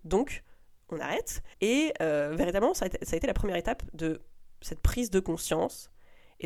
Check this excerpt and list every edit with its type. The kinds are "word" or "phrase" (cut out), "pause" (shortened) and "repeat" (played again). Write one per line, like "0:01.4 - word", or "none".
0:01.5 - pause